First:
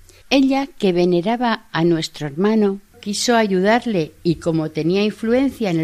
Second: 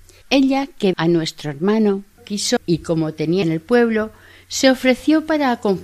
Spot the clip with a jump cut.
second; 3 cuts; at 0.9 s, 2.6 s, 3.4 s

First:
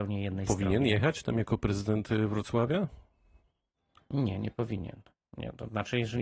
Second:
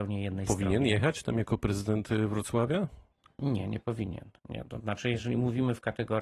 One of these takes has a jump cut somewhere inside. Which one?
second; 2 cuts; at 3.1 s, 4.4 s

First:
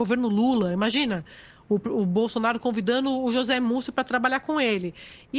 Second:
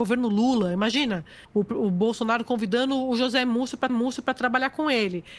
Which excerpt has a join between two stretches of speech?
second; 2 cuts; at 1.4 s, 3.9 s

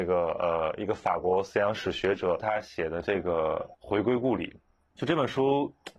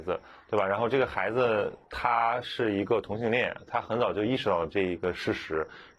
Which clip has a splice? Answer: first; 1 cut; at 3.7 s

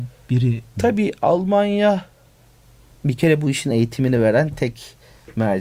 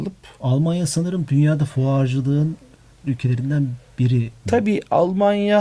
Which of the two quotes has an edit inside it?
second; 1 cut; at 3.1 s

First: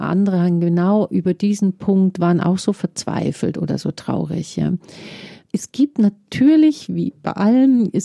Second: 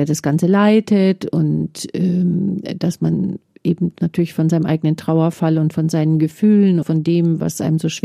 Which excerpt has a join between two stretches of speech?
second; 1 cut; at 6.8 s

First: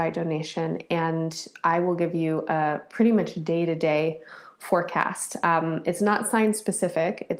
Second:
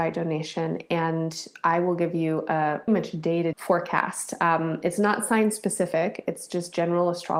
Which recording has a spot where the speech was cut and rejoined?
second; 2 cuts; at 2.9 s, 3.5 s

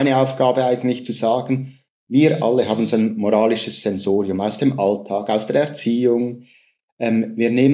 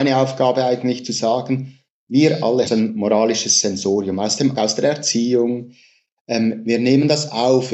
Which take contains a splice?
second; 2 cuts; at 2.7 s, 4.5 s

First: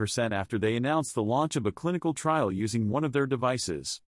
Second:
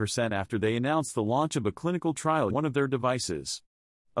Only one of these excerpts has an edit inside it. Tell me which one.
second; 1 cut; at 2.5 s

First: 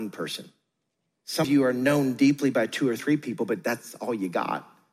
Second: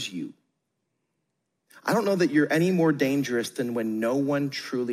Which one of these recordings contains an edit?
first; 1 cut; at 1.4 s

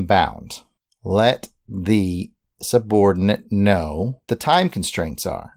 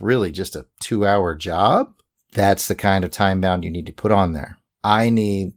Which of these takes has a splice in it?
first; 1 cut; at 4.3 s

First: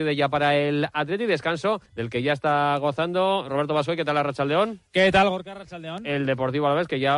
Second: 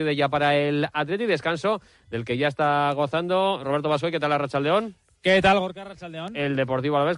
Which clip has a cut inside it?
first; 2 cuts; at 1.9 s, 4.9 s

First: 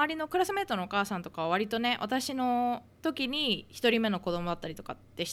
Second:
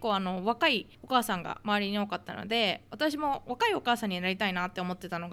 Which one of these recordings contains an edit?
second; 1 cut; at 0.9 s

